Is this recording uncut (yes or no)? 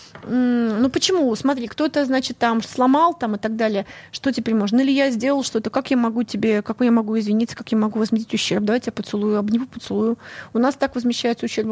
no